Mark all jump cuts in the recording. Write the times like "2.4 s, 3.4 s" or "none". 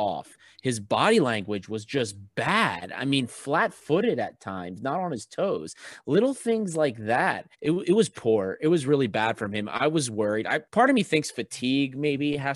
7.5 s, 10.6 s